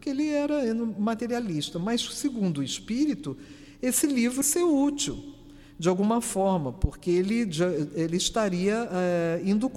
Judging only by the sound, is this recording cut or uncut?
cut